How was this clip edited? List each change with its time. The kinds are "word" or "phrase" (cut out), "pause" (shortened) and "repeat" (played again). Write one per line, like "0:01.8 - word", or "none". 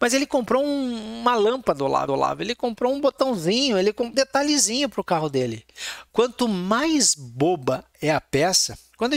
0:02.1 - repeat
0:04.1 - word